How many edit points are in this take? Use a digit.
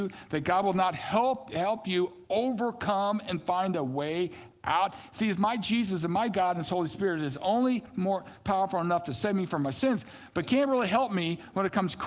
0